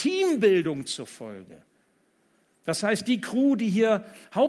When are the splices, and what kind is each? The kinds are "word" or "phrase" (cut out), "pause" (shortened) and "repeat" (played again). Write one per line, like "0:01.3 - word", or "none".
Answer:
none